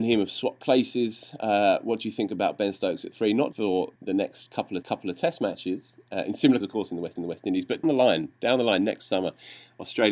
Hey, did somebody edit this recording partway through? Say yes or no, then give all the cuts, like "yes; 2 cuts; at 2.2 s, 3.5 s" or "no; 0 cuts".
yes; 6 cuts; at 3.5 s, 4.0 s, 4.8 s, 6.6 s, 7.2 s, 7.8 s